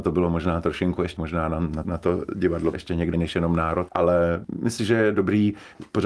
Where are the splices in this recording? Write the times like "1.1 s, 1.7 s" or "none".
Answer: 1.2 s, 1.8 s, 2.7 s, 3.1 s, 3.9 s, 4.8 s